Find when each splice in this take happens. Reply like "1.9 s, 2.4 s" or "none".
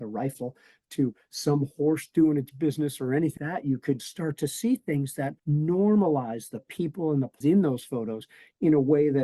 3.4 s, 4.0 s, 5.4 s, 7.4 s